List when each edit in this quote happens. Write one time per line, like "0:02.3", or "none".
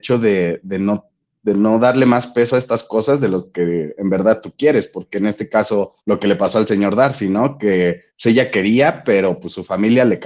0:06.0
0:08.1